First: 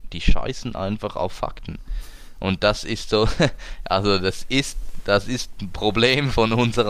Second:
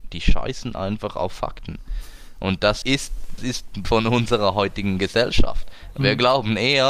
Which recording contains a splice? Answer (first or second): second